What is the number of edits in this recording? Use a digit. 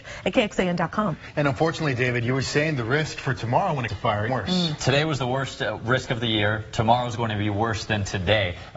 2